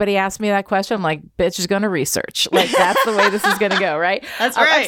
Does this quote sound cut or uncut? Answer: uncut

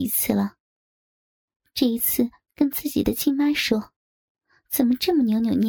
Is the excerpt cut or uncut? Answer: uncut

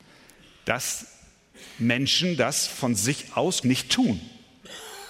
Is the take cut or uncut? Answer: cut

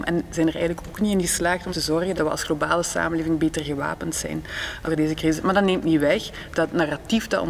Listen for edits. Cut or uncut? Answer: cut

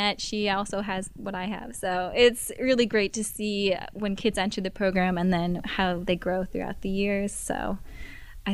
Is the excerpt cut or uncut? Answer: uncut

